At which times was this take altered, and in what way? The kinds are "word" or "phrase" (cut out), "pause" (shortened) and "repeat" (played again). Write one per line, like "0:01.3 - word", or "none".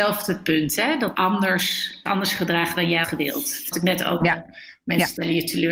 0:01.1 - word
0:02.1 - word
0:03.0 - word
0:03.7 - word
0:04.2 - word